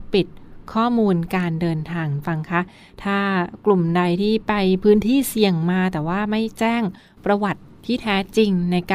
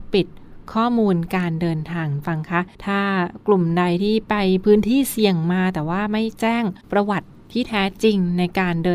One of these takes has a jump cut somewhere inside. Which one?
second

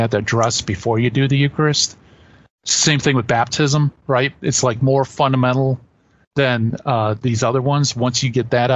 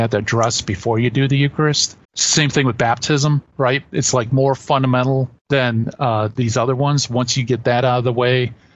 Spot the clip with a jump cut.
second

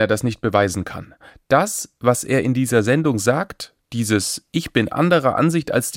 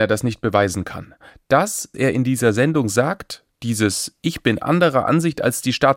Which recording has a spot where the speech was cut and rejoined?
second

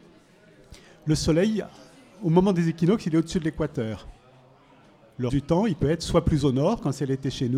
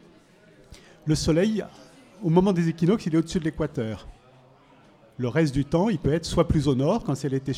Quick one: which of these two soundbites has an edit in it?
first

